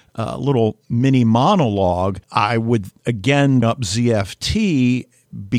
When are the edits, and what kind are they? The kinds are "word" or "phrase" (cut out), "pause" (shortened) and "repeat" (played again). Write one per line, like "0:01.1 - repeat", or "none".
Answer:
0:02.2 - pause
0:03.6 - word